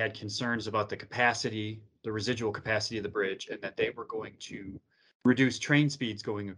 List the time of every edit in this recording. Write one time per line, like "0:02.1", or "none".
none

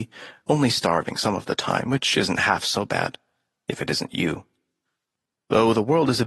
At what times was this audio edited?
none

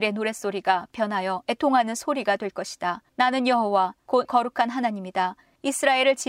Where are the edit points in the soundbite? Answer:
0:04.2

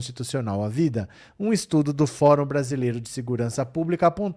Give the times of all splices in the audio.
none

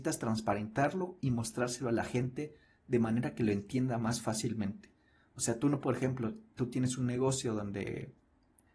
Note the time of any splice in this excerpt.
none

